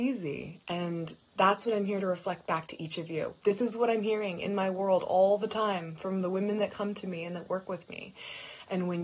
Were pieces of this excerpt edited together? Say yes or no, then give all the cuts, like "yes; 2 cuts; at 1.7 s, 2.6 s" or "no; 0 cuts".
no; 0 cuts